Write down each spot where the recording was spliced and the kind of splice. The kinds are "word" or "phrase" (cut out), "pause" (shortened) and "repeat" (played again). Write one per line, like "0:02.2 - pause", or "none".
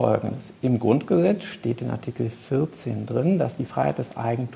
none